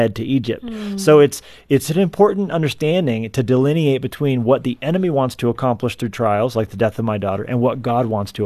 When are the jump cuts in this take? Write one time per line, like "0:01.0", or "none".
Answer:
none